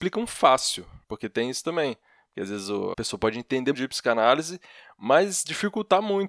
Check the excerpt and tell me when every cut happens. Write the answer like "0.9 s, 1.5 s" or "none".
1.0 s, 2.9 s, 3.7 s